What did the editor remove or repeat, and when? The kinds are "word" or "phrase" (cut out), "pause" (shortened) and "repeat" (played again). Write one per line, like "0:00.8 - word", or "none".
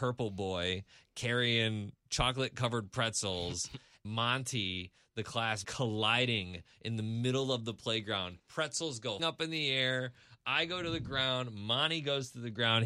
0:04.0 - word
0:05.6 - word
0:08.4 - pause
0:09.2 - word